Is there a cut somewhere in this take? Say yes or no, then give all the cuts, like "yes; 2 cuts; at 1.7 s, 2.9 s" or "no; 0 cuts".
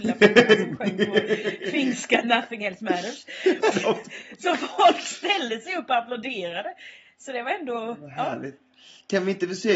yes; 2 cuts; at 2.2 s, 3.7 s